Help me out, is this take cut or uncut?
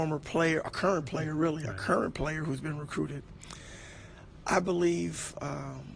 uncut